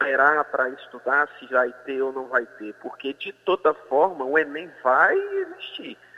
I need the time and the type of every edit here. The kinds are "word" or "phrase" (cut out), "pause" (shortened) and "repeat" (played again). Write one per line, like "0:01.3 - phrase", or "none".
none